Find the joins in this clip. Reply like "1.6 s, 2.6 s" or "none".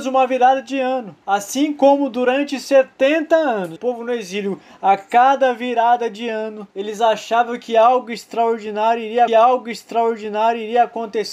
1.2 s, 3.8 s, 6.7 s, 9.3 s